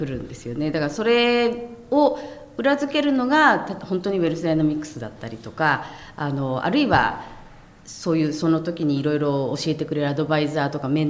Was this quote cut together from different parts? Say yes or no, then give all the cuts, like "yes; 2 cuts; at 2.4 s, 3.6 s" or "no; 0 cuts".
no; 0 cuts